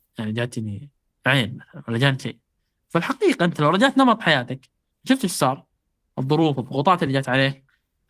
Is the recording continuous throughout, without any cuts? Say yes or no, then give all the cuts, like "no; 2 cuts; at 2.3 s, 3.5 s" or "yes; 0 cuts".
yes; 0 cuts